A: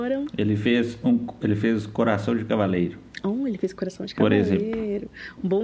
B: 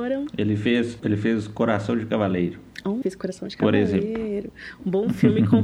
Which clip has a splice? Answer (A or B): B